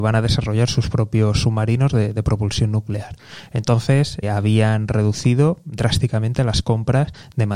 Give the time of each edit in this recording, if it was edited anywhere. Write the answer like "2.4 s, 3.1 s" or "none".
4.2 s